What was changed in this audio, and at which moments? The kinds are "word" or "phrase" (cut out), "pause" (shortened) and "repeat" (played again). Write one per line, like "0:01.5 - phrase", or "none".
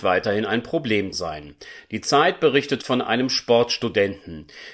0:01.1 - word
0:02.8 - word